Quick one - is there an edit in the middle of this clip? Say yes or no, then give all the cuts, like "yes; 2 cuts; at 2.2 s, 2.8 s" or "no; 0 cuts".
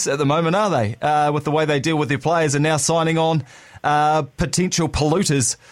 no; 0 cuts